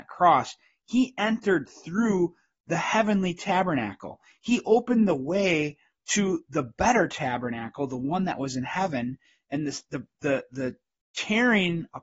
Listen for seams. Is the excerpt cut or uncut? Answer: uncut